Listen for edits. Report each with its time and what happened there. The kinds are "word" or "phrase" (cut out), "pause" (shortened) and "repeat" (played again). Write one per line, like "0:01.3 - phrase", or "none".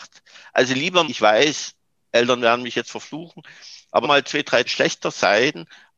0:01.0 - word
0:02.8 - word
0:04.0 - word
0:04.7 - word